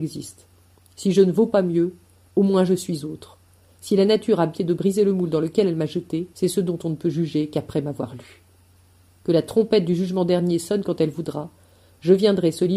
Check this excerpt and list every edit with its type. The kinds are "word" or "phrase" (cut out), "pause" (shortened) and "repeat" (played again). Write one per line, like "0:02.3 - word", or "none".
0:04.6 - phrase
0:06.3 - pause

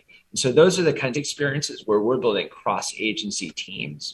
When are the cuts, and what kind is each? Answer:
0:01.1 - phrase

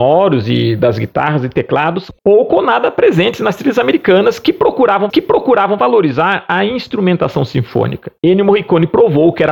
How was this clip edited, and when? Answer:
0:02.2 - pause
0:05.1 - repeat
0:08.2 - pause

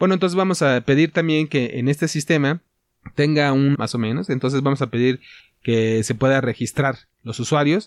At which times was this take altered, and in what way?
0:03.7 - word

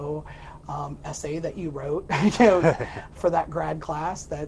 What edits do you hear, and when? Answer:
none

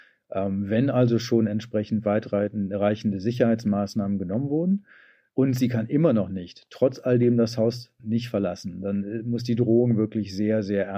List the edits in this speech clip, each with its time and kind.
none

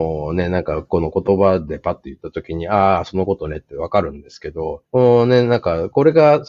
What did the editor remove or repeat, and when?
0:04.9 - pause

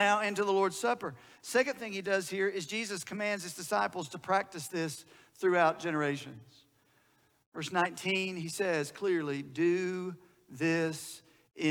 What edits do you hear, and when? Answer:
none

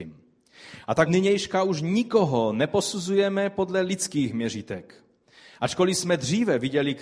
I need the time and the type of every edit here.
0:01.1 - word

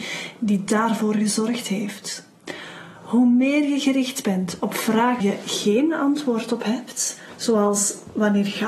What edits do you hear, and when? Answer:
0:05.2 - word

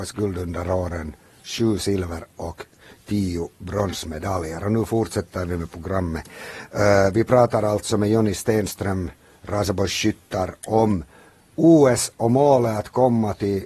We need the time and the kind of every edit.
none

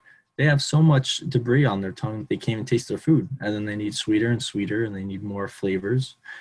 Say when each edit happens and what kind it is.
0:02.2 - word

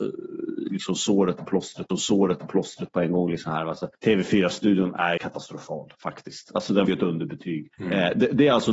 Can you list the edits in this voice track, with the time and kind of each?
0:01.9 - repeat
0:03.9 - pause
0:05.2 - word
0:06.9 - word
0:07.7 - pause

